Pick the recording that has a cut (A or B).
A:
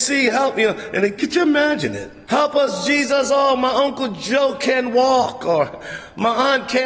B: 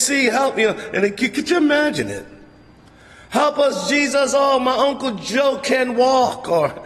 A